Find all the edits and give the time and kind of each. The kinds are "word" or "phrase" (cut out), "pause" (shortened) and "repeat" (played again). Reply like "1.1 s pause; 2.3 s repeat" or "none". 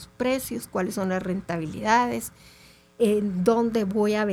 none